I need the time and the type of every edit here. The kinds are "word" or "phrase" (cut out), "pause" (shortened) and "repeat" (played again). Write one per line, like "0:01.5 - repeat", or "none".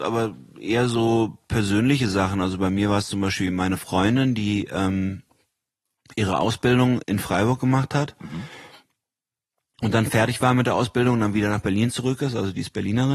0:07.0 - word